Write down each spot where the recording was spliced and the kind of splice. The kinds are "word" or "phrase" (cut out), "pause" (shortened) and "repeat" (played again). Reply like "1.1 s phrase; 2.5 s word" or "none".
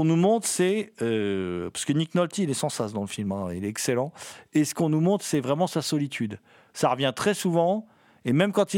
none